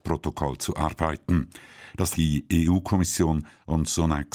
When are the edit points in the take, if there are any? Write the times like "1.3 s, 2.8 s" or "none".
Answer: 2.1 s